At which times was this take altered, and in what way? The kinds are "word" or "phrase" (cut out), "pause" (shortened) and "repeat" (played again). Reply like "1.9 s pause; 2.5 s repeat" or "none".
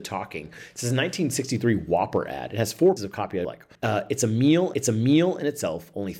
3.0 s word; 3.4 s word; 3.7 s pause; 4.7 s repeat